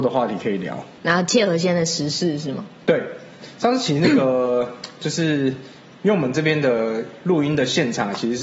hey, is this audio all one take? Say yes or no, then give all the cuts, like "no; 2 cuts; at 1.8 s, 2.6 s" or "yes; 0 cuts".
yes; 0 cuts